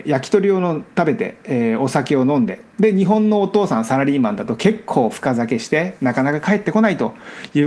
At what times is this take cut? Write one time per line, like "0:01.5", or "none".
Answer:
0:02.7

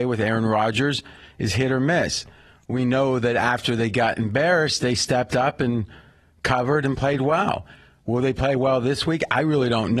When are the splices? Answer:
none

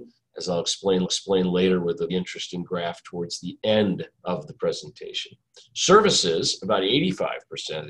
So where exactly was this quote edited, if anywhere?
0:01.0
0:02.1
0:04.1

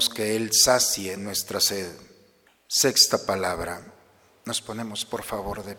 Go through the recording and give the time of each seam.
none

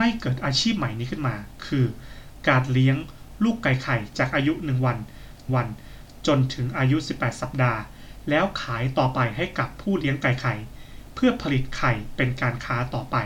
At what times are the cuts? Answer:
0:05.5

